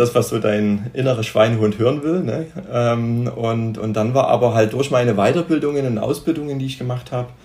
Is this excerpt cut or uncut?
uncut